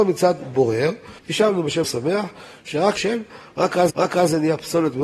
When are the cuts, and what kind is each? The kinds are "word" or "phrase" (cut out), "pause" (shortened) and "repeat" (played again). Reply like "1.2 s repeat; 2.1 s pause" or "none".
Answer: 1.2 s pause; 1.8 s word; 3.0 s phrase; 3.9 s repeat

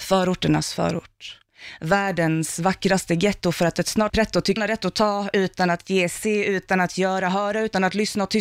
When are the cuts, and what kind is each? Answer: 4.1 s word; 4.6 s word

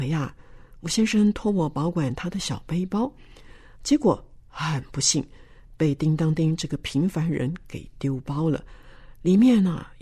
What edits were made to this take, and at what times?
none

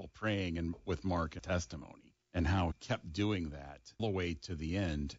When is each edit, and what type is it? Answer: 1.4 s phrase; 2.2 s pause; 2.7 s word; 4.0 s word

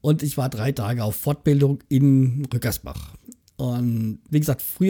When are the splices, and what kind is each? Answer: none

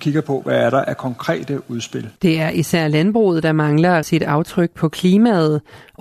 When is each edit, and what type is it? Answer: 2.2 s pause; 4.0 s word

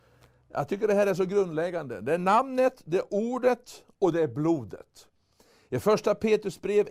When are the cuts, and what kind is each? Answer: none

